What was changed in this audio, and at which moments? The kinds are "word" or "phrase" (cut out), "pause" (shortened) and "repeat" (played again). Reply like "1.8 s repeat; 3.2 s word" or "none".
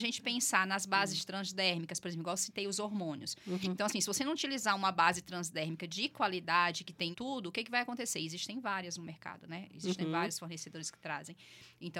7.1 s word